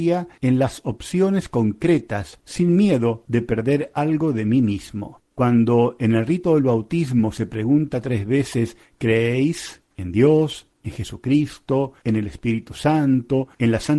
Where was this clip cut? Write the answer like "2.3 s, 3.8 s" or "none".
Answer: 5.2 s, 9.9 s